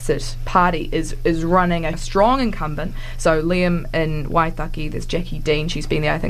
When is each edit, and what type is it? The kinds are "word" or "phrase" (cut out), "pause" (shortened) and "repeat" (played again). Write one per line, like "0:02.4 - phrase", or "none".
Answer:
0:01.9 - phrase